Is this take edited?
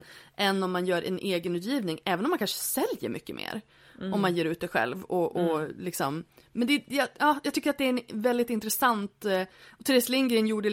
no; 0 cuts

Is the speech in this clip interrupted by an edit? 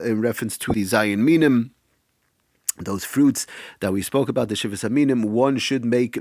no; 0 cuts

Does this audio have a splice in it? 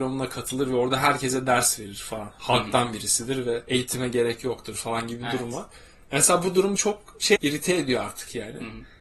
yes; 2 cuts; at 6.8 s, 7.4 s

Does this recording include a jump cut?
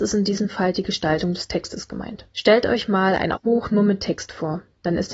yes; 2 cuts; at 2.3 s, 3.3 s

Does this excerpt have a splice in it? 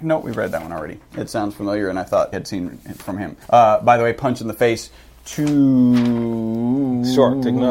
yes; 2 cuts; at 2.3 s, 3.4 s

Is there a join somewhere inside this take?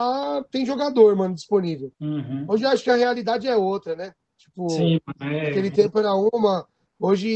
yes; 1 cut; at 1.9 s

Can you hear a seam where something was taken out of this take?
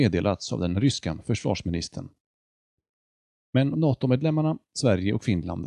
yes; 1 cut; at 3.7 s

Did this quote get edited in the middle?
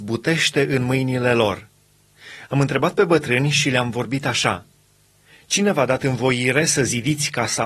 no; 0 cuts

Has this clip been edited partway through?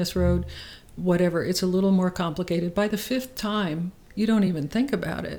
no; 0 cuts

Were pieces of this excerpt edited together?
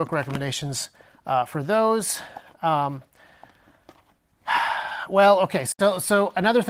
no; 0 cuts

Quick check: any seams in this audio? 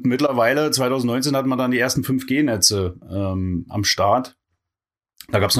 no; 0 cuts

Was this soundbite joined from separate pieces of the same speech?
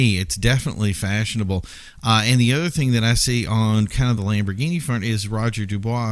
no; 0 cuts

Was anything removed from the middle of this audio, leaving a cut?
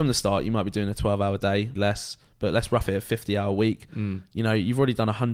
yes; 1 cut; at 1.8 s

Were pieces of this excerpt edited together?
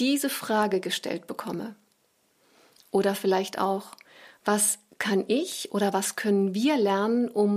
no; 0 cuts

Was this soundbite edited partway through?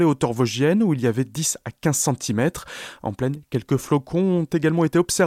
no; 0 cuts

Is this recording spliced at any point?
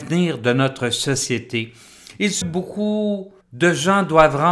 yes; 2 cuts; at 2.4 s, 3.4 s

